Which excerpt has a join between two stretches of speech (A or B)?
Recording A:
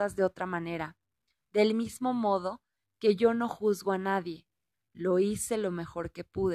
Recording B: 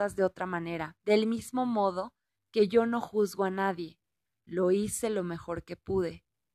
B